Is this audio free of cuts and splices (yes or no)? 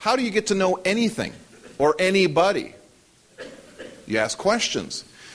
yes